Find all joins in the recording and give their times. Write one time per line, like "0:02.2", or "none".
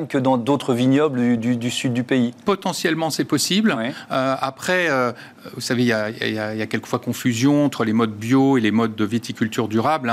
none